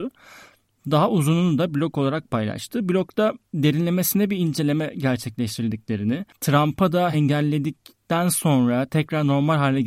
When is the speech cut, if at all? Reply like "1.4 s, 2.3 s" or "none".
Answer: 3.4 s, 7.1 s